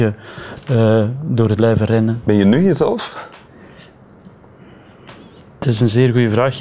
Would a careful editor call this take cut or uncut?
cut